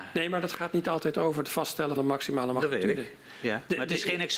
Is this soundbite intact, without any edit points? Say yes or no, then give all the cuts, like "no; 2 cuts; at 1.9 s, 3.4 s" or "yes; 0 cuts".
no; 1 cut; at 2.0 s